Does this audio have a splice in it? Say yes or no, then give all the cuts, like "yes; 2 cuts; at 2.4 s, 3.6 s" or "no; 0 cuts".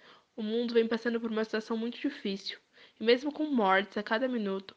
no; 0 cuts